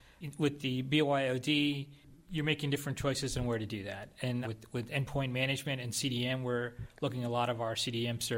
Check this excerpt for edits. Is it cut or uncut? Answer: cut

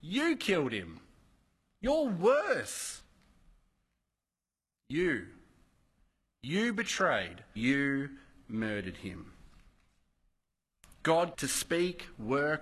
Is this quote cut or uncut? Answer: cut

